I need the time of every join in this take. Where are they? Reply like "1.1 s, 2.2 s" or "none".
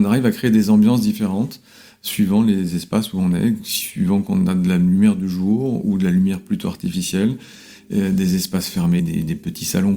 9.0 s